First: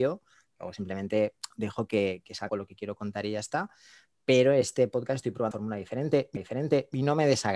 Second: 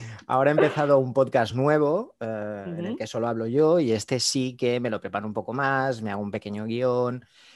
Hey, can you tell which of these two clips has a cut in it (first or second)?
first